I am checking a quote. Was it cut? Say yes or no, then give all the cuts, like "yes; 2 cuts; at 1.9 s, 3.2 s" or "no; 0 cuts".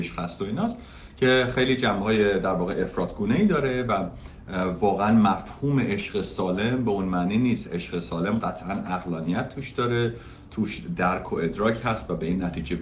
no; 0 cuts